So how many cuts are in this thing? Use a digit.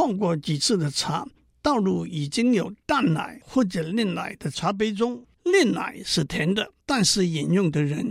2